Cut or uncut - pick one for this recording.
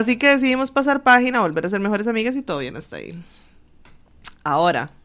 uncut